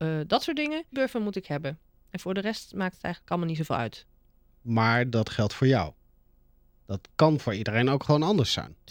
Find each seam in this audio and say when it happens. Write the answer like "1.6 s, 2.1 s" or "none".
0.9 s